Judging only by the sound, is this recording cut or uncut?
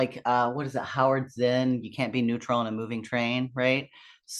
uncut